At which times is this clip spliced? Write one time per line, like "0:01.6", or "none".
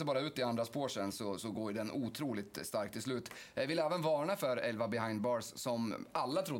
none

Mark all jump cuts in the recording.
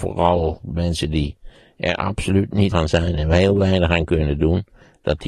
0:02.7

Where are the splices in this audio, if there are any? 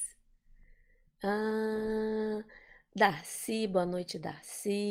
none

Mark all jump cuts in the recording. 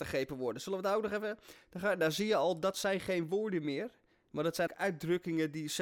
0:04.7

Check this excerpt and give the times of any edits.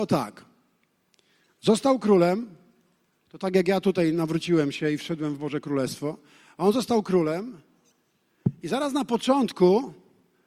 none

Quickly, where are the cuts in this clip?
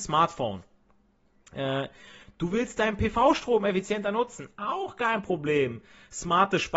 none

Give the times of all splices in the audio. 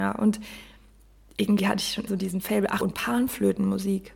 0:02.1
0:02.8

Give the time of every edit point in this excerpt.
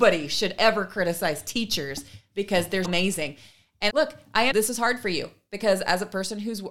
0:02.8
0:03.9
0:04.5

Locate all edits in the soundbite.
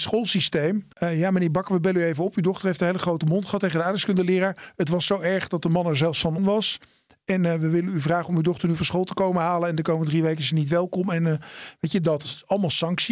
0:00.9
0:06.4

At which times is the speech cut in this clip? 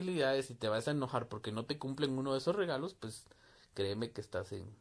none

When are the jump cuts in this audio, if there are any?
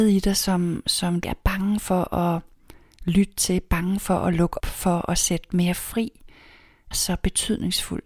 0:01.2
0:04.6
0:06.9

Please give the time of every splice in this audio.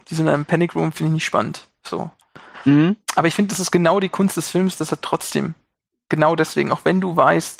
none

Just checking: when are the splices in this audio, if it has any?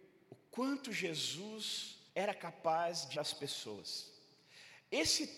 0:02.1
0:03.2

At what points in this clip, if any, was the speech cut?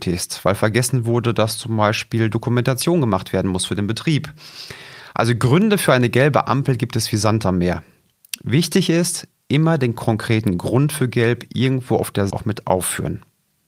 0:12.3

